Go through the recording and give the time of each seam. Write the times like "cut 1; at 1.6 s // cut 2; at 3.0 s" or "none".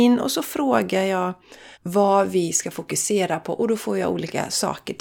cut 1; at 1.7 s